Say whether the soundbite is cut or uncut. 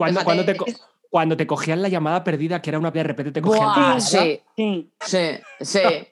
cut